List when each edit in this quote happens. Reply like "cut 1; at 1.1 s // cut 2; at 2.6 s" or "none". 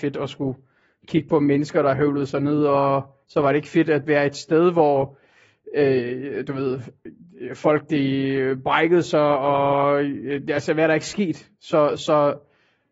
cut 1; at 3.2 s // cut 2; at 11.5 s